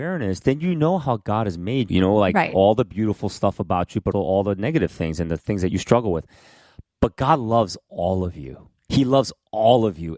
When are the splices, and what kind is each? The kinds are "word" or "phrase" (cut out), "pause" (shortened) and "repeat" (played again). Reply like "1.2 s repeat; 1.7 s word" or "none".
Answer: 1.9 s word; 4.1 s word